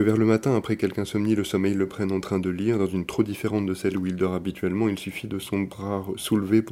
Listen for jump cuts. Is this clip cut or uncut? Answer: cut